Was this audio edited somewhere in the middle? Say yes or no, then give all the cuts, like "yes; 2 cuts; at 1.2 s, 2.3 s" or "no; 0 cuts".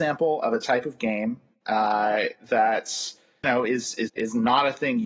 yes; 2 cuts; at 3.4 s, 4.1 s